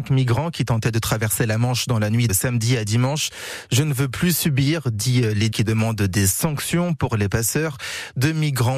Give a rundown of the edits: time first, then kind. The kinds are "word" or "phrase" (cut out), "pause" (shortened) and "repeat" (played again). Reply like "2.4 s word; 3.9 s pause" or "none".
2.3 s word; 5.5 s word

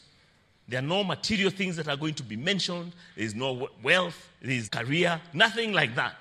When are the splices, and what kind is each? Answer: 4.7 s word

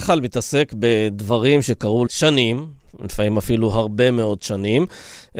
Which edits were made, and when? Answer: 2.1 s word

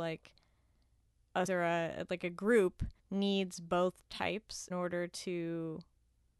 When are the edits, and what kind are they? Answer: 1.5 s word; 3.0 s pause; 4.7 s word

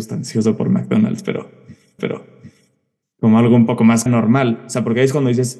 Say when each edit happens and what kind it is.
2.0 s repeat; 4.1 s word

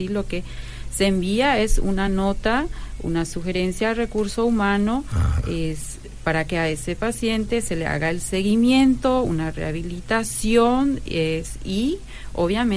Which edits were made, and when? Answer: none

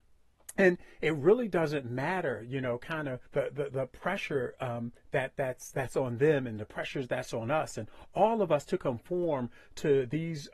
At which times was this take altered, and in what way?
3.3 s pause

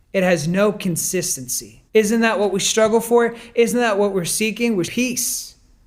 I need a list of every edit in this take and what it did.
1.9 s pause; 4.8 s word

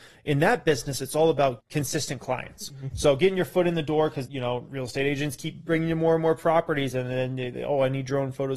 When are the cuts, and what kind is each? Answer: 1.6 s word; 4.2 s word; 4.7 s word

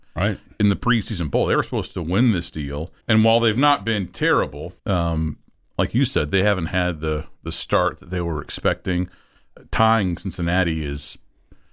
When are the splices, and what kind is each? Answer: 3.0 s pause; 4.8 s pause

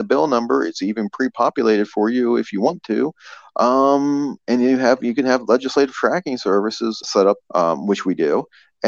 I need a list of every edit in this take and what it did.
7.0 s word; 7.4 s word

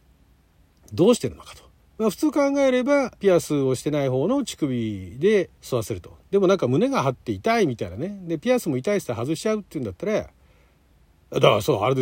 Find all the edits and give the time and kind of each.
1.8 s pause; 3.2 s pause; 5.5 s pause

